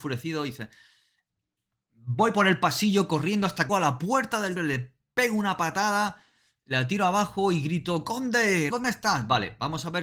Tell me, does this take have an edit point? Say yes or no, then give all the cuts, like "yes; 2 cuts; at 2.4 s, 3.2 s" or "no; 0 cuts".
yes; 3 cuts; at 3.7 s, 4.6 s, 8.7 s